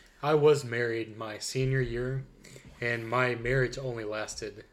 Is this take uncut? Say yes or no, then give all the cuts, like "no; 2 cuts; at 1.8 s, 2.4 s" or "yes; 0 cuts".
yes; 0 cuts